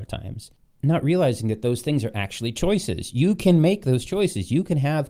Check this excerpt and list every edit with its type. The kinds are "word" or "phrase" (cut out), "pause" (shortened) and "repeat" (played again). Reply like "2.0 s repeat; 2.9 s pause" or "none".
none

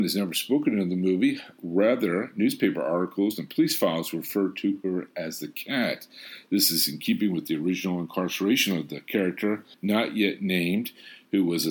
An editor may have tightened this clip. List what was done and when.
9.7 s pause

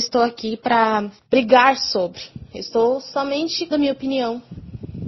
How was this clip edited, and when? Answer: 1.2 s pause; 3.7 s word

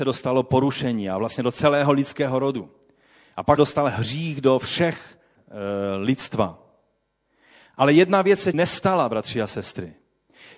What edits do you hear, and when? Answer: 3.6 s word; 5.4 s word; 8.5 s word

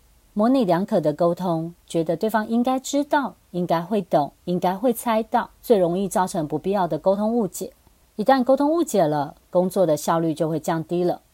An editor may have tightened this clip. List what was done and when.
3.4 s pause; 4.4 s pause; 5.6 s pause; 8.0 s pause

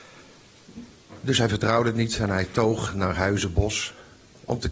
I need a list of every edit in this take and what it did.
none

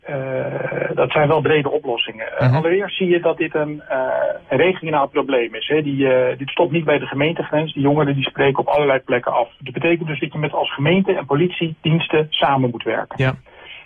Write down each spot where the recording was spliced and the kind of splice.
10.2 s word

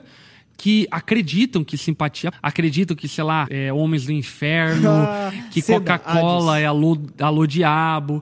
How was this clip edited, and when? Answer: 2.3 s word; 3.5 s word

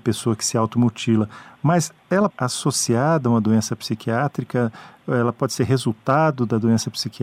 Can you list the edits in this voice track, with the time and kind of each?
2.3 s phrase

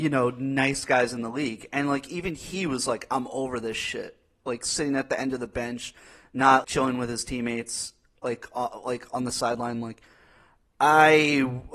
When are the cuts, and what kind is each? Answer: 6.6 s word

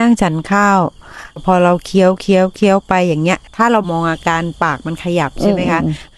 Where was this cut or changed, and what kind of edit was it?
3.5 s pause

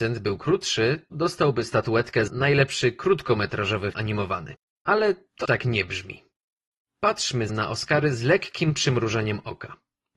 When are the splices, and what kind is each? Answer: 1.1 s word; 2.3 s word; 3.9 s word; 5.4 s word; 7.5 s word

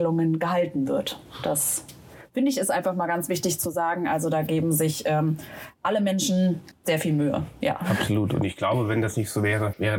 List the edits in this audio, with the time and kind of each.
none

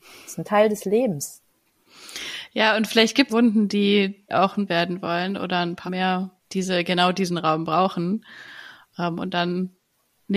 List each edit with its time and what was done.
3.3 s phrase; 4.3 s word; 4.7 s phrase; 5.9 s word; 6.4 s pause

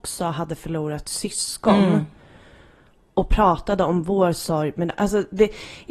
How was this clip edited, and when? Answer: none

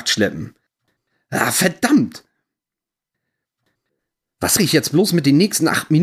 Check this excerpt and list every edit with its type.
4.6 s word

